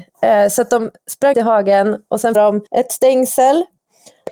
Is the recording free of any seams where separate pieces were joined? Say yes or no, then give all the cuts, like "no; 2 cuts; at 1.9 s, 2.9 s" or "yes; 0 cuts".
no; 3 cuts; at 1.3 s, 2.3 s, 2.7 s